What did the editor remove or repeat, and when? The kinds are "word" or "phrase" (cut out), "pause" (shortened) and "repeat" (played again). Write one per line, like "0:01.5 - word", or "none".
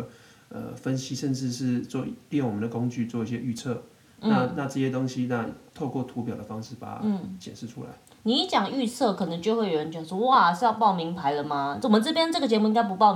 none